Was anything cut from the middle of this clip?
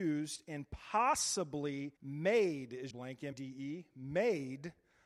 yes; 3 cuts; at 2.0 s, 2.9 s, 3.3 s

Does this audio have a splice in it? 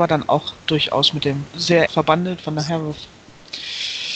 yes; 2 cuts; at 1.5 s, 1.9 s

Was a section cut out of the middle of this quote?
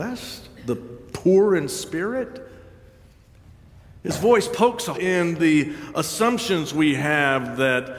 yes; 1 cut; at 4.9 s

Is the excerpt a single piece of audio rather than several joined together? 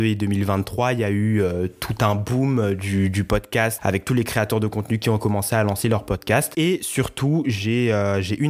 yes; 0 cuts

